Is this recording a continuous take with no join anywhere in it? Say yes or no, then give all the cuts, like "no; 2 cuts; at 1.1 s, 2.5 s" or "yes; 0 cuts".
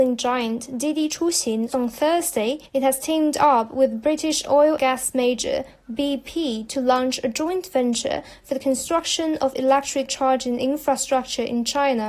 no; 4 cuts; at 1.7 s, 2.7 s, 4.8 s, 10.1 s